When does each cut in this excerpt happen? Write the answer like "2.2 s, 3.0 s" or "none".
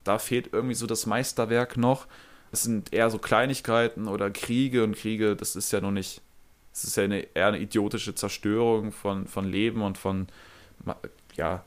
none